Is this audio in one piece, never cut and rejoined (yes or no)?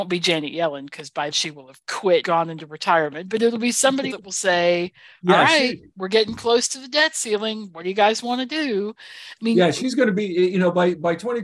no